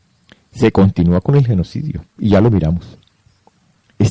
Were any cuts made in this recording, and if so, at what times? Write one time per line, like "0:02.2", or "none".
0:02.1